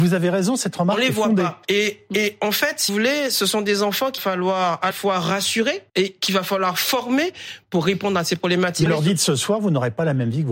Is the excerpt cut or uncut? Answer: cut